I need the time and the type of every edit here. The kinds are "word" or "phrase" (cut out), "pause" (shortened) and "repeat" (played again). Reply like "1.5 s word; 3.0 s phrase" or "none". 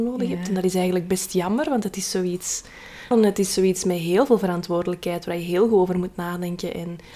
3.1 s word